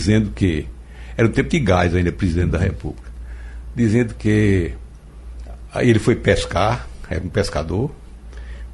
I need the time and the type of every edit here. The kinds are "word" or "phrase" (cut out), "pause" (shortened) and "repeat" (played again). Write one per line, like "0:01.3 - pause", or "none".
none